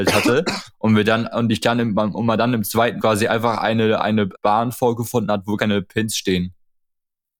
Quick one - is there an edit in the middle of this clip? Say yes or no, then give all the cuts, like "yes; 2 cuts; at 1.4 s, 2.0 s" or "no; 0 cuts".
yes; 3 cuts; at 3.0 s, 4.3 s, 5.6 s